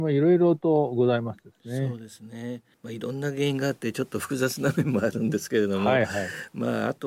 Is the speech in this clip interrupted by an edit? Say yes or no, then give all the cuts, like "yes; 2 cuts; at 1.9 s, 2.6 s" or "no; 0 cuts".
no; 0 cuts